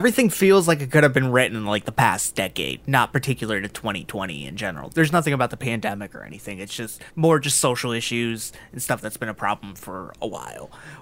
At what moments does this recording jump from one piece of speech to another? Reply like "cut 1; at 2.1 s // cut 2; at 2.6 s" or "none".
cut 1; at 7.1 s